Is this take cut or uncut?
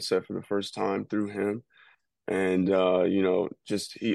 uncut